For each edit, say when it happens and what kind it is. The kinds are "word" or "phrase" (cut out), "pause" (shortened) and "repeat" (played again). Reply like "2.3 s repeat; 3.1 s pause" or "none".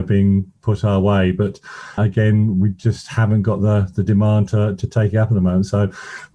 2.0 s word